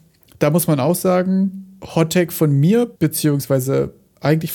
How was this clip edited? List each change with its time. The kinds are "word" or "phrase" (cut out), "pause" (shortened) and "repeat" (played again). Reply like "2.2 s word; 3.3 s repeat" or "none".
3.0 s pause